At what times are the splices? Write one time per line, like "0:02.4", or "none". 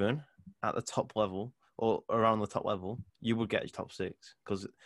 0:03.1

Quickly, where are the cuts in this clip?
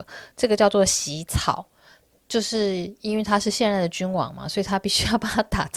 none

